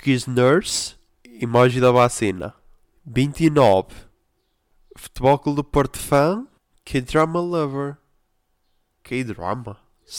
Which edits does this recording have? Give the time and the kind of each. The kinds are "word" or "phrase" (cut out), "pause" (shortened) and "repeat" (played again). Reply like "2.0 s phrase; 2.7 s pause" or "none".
1.1 s pause; 2.8 s pause; 6.6 s pause